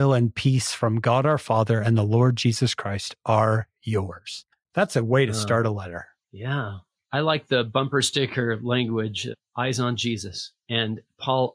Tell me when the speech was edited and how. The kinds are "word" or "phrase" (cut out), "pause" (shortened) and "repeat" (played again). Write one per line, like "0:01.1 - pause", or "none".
0:04.5 - pause
0:06.2 - pause
0:10.6 - pause